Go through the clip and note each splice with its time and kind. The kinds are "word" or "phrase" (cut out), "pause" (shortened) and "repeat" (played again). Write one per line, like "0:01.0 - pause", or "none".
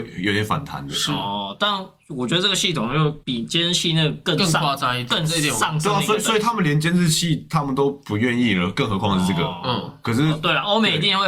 0:03.2 - pause

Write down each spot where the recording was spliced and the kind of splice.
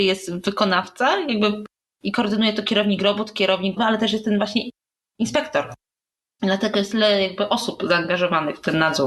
0:03.8 - word

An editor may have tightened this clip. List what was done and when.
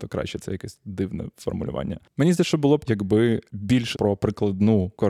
0:02.4 - word
0:02.9 - word
0:03.5 - word
0:03.9 - word

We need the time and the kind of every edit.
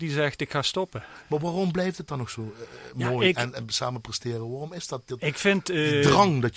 none

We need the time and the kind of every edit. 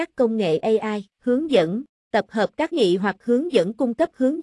0:01.1 - pause
0:02.1 - word
0:02.7 - word

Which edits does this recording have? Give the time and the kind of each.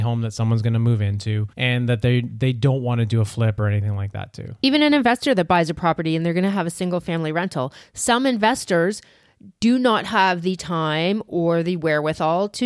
0:01.5 - pause

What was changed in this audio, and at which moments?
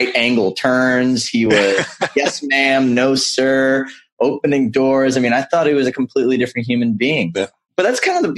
none

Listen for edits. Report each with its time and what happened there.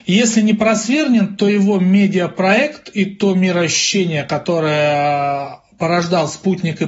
none

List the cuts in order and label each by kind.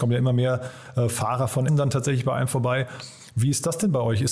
0:01.7 - word

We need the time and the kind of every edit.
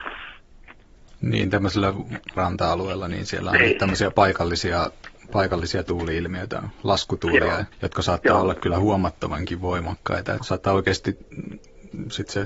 0:02.4 - word
0:07.7 - pause
0:10.4 - word

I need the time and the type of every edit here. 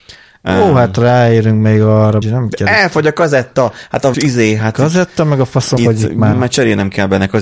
0:02.2 - word
0:04.1 - word
0:05.8 - word
0:06.3 - word

